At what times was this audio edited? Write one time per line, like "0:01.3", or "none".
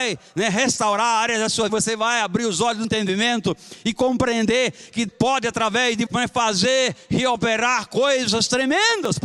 0:01.7
0:02.8
0:05.1
0:06.1